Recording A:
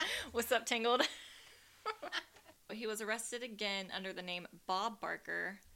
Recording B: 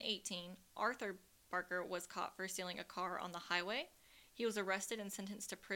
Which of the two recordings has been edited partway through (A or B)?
A